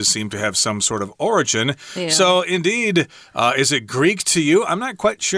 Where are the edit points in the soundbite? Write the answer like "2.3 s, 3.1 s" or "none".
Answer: none